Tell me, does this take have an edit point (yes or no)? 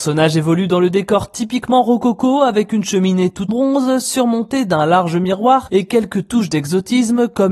yes